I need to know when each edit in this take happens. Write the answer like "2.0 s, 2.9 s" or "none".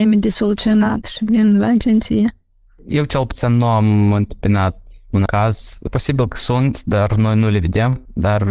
5.3 s